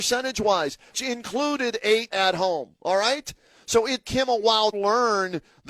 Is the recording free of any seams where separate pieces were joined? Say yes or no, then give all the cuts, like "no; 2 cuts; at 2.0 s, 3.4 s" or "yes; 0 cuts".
no; 4 cuts; at 0.9 s, 2.1 s, 4.0 s, 4.7 s